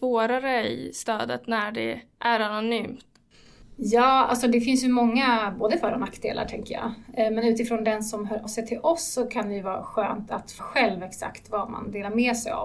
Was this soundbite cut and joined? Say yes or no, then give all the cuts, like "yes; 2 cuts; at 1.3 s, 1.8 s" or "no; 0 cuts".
yes; 2 cuts; at 8.5 s, 10.6 s